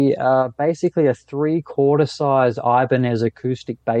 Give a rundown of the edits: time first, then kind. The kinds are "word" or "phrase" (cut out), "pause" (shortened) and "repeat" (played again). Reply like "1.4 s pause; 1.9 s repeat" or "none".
none